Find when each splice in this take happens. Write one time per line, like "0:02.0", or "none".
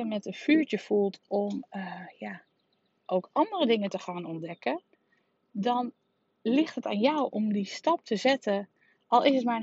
none